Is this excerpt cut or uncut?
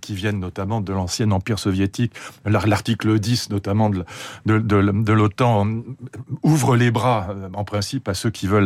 uncut